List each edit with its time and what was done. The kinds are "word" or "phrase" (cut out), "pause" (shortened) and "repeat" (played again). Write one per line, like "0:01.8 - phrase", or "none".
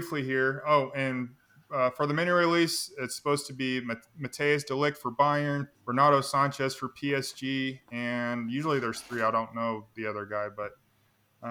0:05.7 - pause